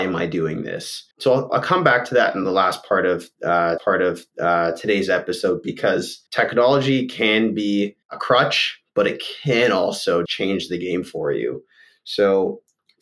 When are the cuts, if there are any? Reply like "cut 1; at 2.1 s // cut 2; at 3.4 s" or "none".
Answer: cut 1; at 1.1 s // cut 2; at 1.5 s // cut 3; at 3.8 s // cut 4; at 6.3 s // cut 5; at 8.0 s // cut 6; at 10.3 s